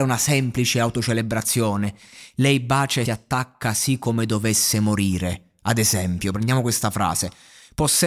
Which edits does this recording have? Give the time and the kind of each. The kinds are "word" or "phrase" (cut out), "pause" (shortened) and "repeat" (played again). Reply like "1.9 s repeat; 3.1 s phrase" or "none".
3.1 s word

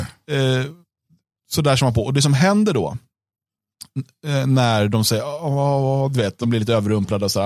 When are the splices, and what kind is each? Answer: none

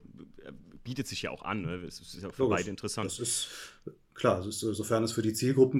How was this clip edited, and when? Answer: 2.3 s word

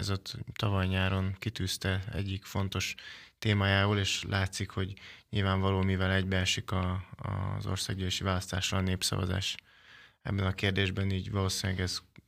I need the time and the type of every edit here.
none

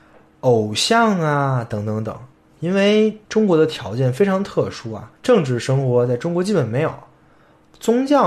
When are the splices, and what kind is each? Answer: 3.2 s pause; 5.1 s pause

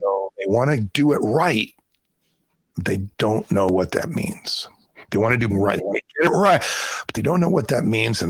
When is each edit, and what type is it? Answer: 3.1 s pause; 5.5 s word

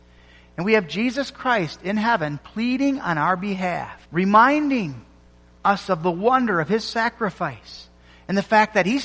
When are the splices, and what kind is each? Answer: 4.0 s pause

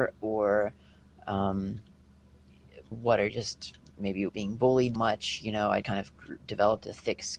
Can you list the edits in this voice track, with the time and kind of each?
2.9 s word; 3.3 s phrase; 3.8 s pause; 4.3 s word; 4.9 s word; 5.8 s word

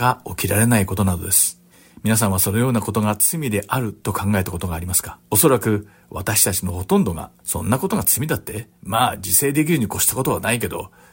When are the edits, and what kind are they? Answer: 1.7 s pause; 5.2 s pause; 7.4 s pause; 8.7 s pause

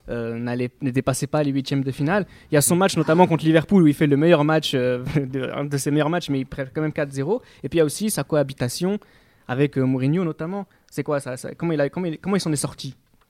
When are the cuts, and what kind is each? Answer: none

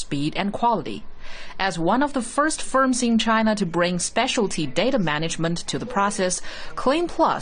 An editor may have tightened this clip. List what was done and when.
none

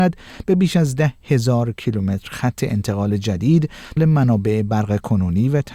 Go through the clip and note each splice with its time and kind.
4.0 s phrase

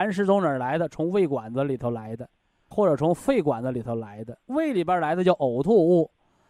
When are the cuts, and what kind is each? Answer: 2.7 s word; 4.4 s word

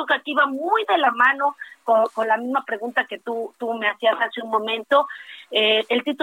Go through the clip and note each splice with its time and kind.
none

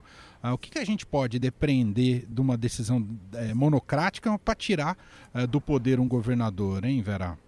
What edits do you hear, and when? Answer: none

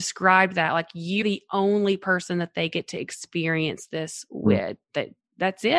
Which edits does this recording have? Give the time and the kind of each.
1.2 s word

